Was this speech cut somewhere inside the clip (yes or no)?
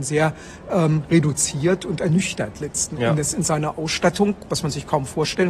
no